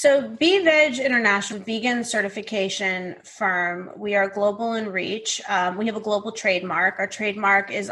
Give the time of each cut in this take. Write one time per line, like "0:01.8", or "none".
0:01.5